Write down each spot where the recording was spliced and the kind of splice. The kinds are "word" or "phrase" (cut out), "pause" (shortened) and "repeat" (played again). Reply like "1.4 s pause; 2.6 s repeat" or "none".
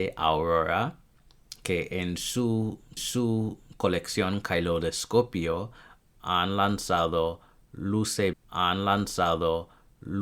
3.0 s repeat; 8.3 s repeat